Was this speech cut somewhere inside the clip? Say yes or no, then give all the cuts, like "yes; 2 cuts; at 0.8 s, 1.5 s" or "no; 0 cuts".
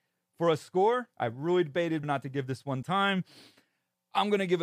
yes; 3 cuts; at 1.1 s, 2.0 s, 2.8 s